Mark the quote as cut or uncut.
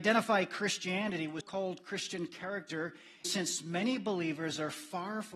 cut